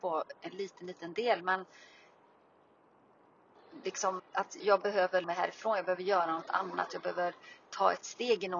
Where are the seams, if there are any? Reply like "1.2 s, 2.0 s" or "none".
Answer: 4.2 s, 4.6 s, 5.2 s